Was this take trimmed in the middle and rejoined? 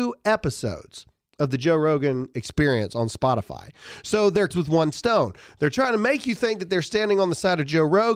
yes; 1 cut; at 4.5 s

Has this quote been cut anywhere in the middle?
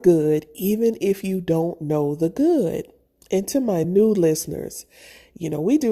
no; 0 cuts

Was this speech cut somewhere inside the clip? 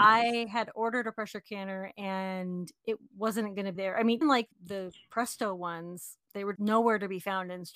yes; 4 cuts; at 3.7 s, 4.2 s, 4.5 s, 6.6 s

